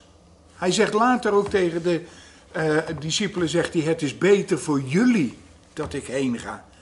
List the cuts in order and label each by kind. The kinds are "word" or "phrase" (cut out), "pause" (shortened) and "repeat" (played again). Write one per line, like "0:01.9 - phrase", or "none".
none